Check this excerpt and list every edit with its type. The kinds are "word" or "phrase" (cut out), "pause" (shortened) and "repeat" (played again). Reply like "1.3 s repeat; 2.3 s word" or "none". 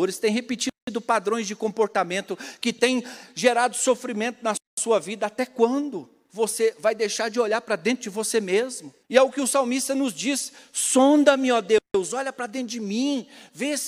9.0 s pause